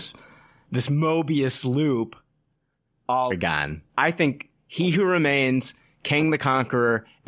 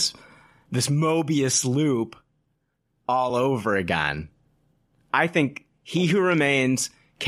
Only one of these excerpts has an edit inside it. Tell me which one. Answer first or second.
first